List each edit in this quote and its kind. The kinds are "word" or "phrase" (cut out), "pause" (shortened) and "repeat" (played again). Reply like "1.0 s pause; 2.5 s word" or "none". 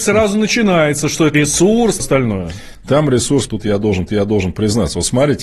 1.3 s word; 2.0 s phrase; 3.5 s word; 4.1 s repeat